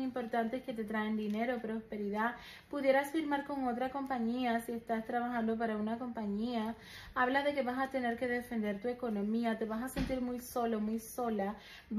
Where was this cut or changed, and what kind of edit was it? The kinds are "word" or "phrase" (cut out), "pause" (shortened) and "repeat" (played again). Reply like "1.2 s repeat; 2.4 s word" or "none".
none